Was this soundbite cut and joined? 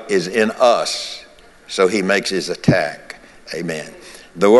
no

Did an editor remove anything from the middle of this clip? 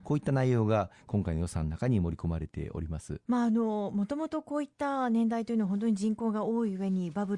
yes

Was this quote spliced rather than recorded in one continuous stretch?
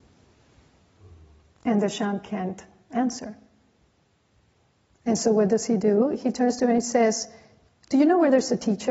no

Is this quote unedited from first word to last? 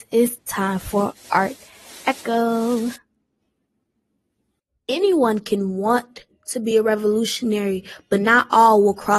yes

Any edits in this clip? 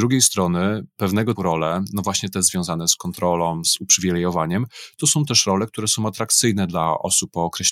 yes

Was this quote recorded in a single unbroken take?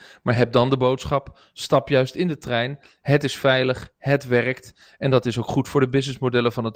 yes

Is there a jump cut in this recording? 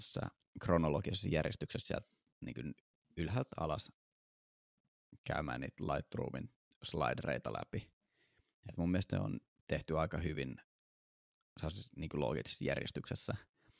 no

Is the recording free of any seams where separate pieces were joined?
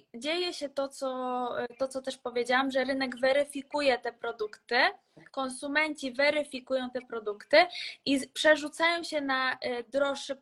yes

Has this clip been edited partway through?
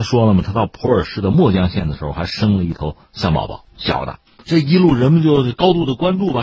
yes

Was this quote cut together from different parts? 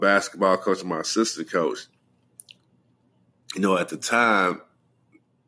no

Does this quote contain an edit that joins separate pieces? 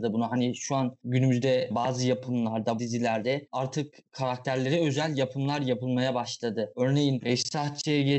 yes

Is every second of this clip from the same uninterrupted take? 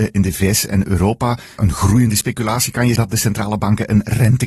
no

